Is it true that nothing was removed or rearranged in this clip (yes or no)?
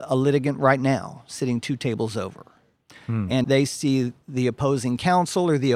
no